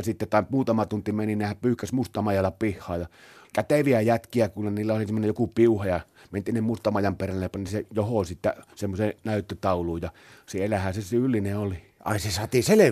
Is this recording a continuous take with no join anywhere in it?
yes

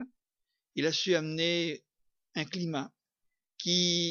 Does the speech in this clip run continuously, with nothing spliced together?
yes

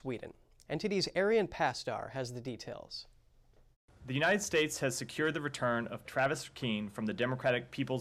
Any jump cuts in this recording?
yes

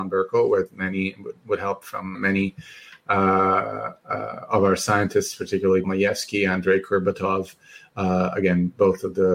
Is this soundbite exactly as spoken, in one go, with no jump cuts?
no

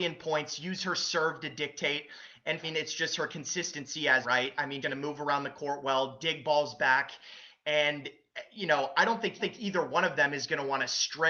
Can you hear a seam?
yes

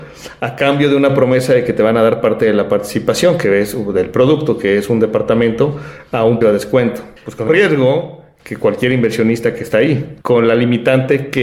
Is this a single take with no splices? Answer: no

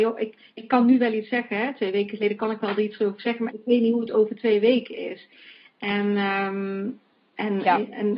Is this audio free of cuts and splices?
yes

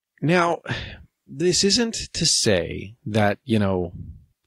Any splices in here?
no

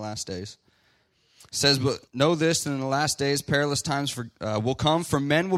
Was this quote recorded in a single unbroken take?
no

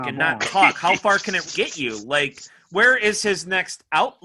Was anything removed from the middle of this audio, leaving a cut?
yes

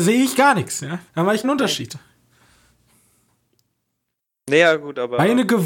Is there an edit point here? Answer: yes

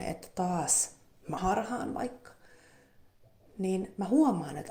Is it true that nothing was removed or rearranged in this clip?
no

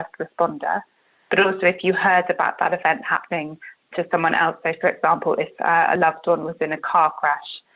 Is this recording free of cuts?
yes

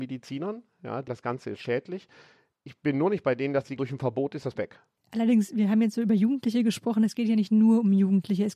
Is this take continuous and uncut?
no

